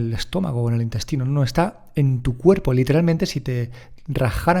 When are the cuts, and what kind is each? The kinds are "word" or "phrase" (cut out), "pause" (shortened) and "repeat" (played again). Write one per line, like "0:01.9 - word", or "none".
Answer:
none